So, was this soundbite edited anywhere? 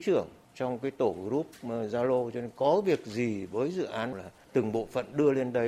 yes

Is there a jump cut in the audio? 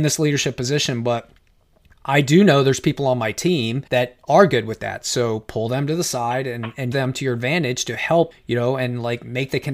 yes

